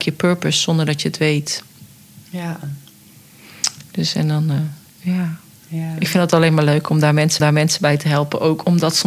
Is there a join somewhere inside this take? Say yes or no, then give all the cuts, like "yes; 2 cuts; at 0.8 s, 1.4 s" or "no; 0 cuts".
yes; 1 cut; at 7.4 s